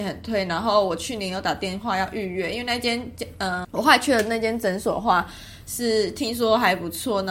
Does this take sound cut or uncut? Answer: cut